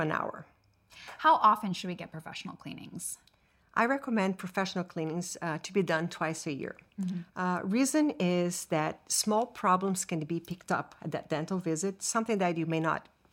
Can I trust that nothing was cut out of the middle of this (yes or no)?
yes